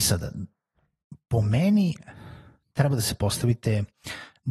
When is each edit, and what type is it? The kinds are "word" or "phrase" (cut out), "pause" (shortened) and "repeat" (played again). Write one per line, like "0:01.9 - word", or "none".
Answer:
none